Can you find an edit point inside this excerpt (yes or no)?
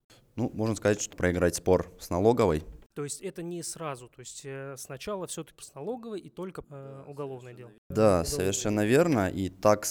yes